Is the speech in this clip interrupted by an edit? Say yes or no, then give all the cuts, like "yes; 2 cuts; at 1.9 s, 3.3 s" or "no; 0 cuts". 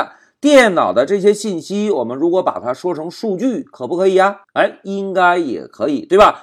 yes; 1 cut; at 4.4 s